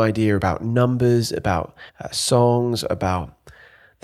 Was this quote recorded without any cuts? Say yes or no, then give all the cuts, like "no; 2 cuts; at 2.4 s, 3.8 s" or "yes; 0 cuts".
no; 1 cut; at 1.9 s